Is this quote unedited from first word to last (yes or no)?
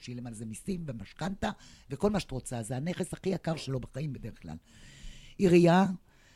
yes